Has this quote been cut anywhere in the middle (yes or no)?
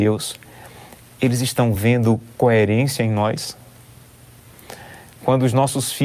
no